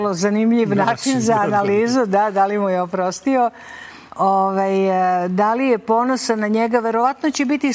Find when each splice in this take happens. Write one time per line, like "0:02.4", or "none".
0:04.1